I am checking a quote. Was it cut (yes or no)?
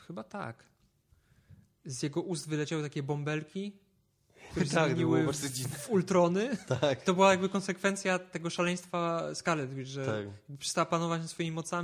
no